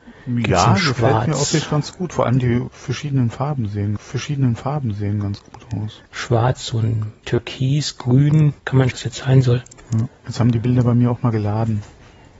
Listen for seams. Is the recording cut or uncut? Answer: cut